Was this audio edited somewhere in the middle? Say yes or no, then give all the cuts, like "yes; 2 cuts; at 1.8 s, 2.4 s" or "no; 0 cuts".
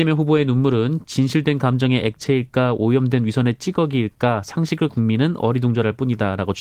yes; 1 cut; at 4.9 s